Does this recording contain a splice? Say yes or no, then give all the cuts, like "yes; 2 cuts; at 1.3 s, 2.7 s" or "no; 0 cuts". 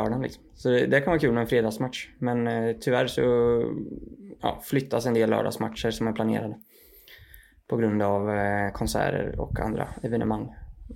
no; 0 cuts